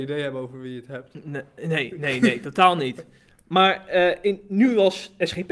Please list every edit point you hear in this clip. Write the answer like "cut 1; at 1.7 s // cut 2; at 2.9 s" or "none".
none